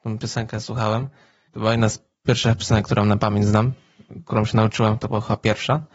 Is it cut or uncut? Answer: uncut